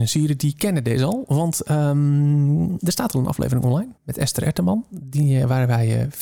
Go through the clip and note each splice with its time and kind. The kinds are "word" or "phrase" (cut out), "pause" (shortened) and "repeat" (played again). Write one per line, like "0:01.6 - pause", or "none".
0:02.8 - word
0:04.0 - pause